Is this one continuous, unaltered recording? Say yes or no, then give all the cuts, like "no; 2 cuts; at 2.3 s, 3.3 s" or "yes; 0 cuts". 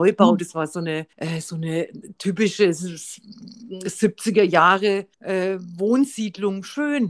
no; 2 cuts; at 1.1 s, 5.1 s